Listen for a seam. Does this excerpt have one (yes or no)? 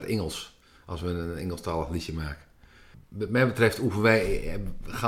no